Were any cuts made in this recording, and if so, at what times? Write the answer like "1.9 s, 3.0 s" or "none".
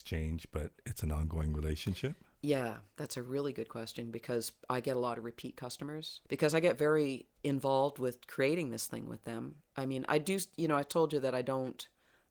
2.3 s, 6.2 s, 7.3 s, 9.6 s

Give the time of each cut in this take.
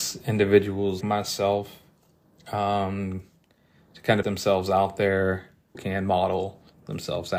1.0 s, 4.2 s, 5.7 s

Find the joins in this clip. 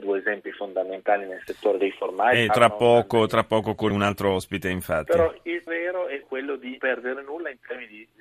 2.5 s, 3.9 s, 5.7 s, 6.2 s, 6.8 s

